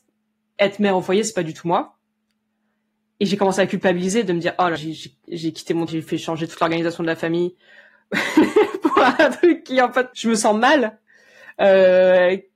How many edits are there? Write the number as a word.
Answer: three